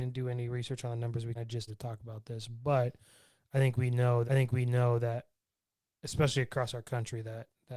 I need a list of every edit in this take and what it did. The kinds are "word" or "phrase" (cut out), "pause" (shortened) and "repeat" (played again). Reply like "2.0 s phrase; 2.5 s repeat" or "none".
1.3 s word; 1.7 s word; 4.2 s repeat